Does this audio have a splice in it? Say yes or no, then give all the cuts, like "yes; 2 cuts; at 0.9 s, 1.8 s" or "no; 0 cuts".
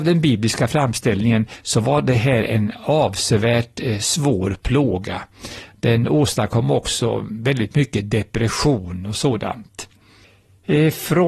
no; 0 cuts